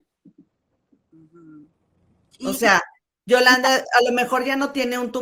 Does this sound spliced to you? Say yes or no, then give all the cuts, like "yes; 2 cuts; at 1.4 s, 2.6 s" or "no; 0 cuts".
no; 0 cuts